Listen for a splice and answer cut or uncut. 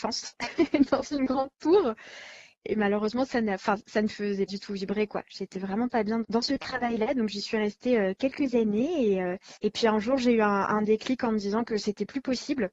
cut